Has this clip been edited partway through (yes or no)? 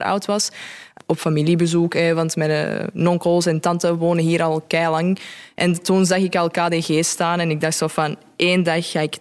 no